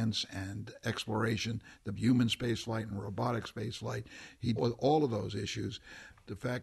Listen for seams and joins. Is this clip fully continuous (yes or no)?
no